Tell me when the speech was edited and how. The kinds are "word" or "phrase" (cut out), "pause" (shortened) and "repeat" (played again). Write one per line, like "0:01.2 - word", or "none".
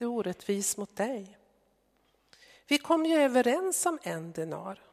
none